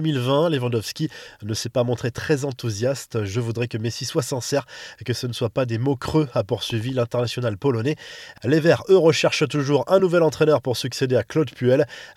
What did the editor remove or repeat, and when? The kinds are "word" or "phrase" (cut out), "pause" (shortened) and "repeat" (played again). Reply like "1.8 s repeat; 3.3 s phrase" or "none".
none